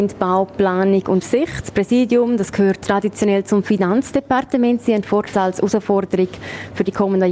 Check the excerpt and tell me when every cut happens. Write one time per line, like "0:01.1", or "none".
0:01.2
0:05.3